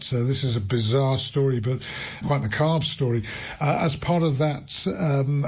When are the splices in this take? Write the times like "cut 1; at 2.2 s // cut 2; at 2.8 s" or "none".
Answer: cut 1; at 2.2 s